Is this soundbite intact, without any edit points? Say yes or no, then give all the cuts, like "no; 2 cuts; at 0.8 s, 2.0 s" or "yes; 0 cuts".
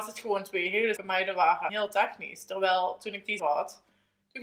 no; 3 cuts; at 1.0 s, 1.7 s, 3.4 s